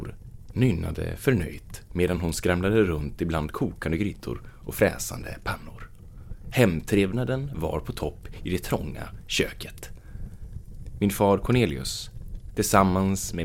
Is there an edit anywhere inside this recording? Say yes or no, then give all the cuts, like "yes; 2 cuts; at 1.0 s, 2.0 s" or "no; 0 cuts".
no; 0 cuts